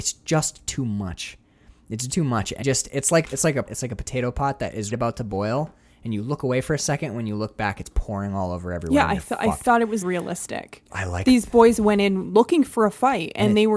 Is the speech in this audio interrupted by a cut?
yes; 7 cuts; at 2.1 s, 2.6 s, 3.2 s, 3.7 s, 4.9 s, 10.0 s, 10.9 s

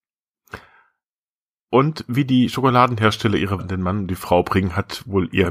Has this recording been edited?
yes; 1 cut; at 3.6 s

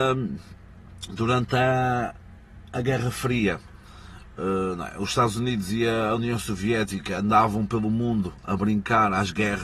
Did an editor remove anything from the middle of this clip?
no; 0 cuts

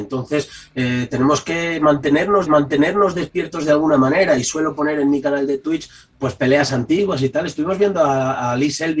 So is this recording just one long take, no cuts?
no; 1 cut; at 2.5 s

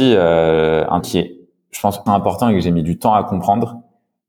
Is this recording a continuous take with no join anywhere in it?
no; 2 cuts; at 1.0 s, 2.1 s

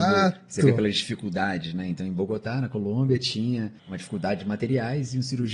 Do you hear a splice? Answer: yes; 1 cut; at 3.8 s

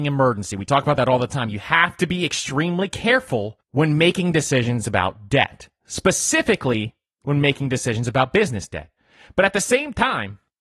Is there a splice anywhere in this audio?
no; 0 cuts

